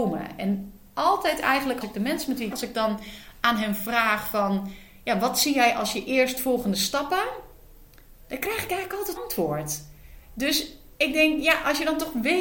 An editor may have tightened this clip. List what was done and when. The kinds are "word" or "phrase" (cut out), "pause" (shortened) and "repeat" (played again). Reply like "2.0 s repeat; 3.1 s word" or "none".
1.8 s word; 2.5 s phrase; 9.2 s word

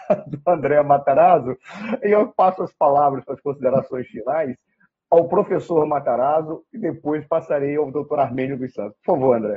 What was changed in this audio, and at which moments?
none

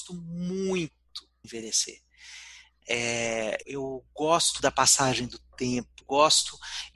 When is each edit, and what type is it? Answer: 1.4 s word; 3.6 s word; 4.6 s word; 6.0 s word

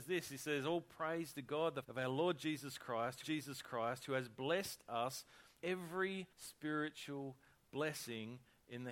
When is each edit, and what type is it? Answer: 1.8 s word; 3.2 s repeat; 5.6 s word; 6.3 s pause

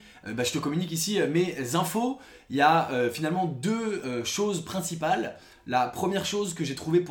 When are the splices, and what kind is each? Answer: none

